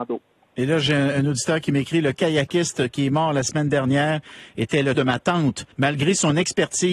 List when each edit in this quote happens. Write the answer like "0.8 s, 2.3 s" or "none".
4.9 s, 5.7 s